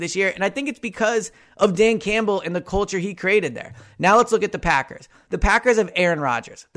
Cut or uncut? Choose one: uncut